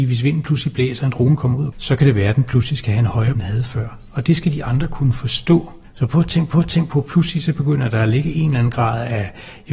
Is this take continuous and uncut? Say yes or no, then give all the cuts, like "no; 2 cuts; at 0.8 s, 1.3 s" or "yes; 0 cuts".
no; 4 cuts; at 1.7 s, 3.3 s, 5.8 s, 6.5 s